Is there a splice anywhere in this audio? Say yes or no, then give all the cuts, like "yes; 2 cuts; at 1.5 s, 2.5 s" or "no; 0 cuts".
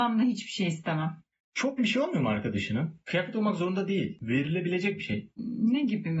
yes; 1 cut; at 1.8 s